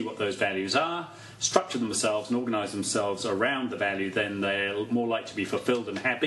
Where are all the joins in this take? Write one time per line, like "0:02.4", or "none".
none